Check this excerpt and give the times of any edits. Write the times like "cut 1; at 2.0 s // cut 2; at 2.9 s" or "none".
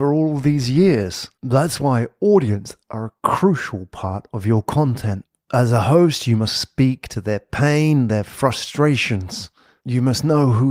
cut 1; at 1.3 s